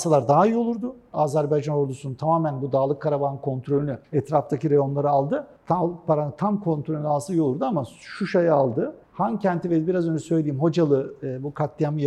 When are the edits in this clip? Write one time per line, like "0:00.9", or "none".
0:04.0
0:05.6
0:09.0